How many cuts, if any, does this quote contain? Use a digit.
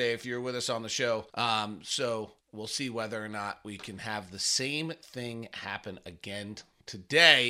2